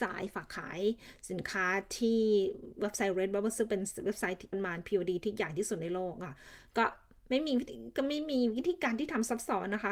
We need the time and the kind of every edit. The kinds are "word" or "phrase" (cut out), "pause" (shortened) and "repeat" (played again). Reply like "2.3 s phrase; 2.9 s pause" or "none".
4.5 s word